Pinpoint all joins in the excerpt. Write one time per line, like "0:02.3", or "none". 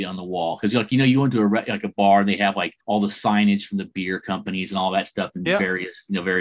0:02.8

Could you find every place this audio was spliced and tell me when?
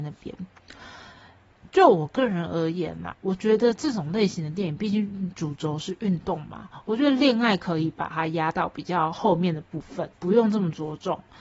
0:03.1
0:10.1

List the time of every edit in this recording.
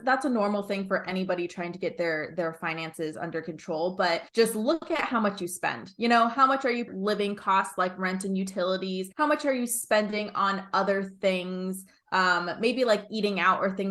0:04.3
0:06.9
0:09.1

